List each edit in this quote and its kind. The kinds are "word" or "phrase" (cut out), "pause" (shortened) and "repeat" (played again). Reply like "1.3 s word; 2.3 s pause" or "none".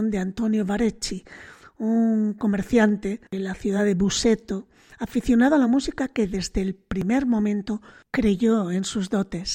none